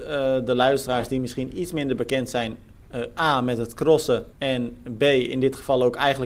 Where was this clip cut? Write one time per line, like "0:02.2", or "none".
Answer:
0:04.3